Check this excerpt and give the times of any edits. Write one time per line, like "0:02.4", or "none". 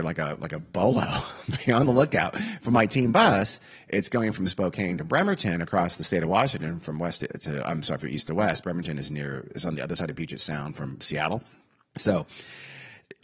none